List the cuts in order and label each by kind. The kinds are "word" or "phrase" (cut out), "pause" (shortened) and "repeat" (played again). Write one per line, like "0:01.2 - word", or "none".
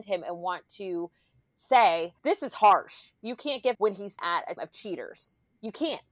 0:02.2 - pause
0:03.7 - phrase
0:04.2 - word
0:04.6 - word